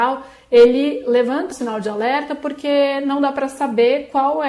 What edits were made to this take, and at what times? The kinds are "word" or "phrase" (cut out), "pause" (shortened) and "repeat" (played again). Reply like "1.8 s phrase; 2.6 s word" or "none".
1.5 s word